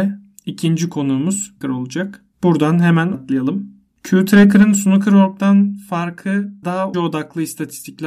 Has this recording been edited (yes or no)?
yes